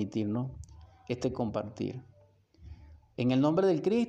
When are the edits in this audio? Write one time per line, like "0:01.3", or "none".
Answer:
0:03.0